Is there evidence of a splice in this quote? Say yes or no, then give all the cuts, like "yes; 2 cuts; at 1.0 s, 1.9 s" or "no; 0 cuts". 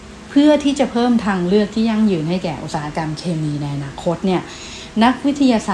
no; 0 cuts